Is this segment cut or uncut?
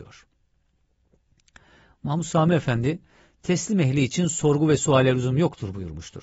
uncut